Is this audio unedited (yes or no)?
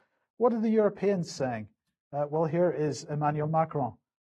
yes